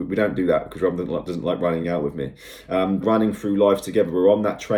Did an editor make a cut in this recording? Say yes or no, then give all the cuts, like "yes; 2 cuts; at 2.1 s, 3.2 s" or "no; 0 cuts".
yes; 2 cuts; at 1.8 s, 3.0 s